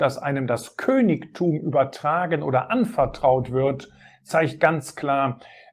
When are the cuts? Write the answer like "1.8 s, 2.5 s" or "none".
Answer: none